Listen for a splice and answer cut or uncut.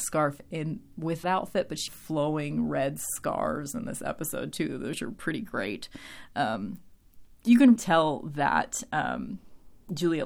cut